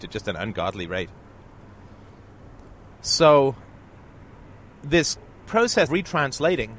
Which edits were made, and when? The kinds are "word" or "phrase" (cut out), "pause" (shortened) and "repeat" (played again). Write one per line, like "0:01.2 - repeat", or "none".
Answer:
0:05.9 - word